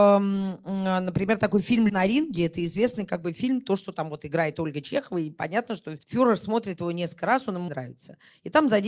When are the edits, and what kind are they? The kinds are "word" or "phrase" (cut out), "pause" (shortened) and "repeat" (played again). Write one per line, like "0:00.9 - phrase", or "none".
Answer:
0:01.9 - word
0:06.0 - pause
0:07.7 - word

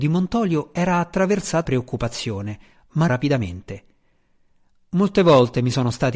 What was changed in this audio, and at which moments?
0:01.6 - word
0:03.1 - word

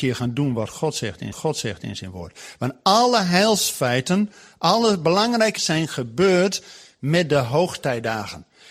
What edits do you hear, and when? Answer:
0:01.3 - repeat
0:05.6 - word

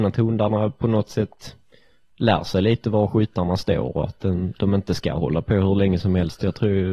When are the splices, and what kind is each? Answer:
none

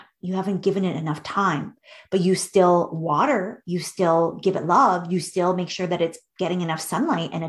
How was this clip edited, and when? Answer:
none

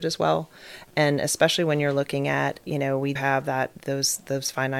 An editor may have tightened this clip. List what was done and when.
0:03.2 - word

